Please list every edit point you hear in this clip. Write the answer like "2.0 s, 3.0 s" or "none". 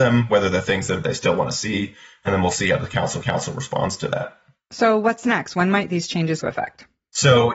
1.0 s, 3.2 s, 6.4 s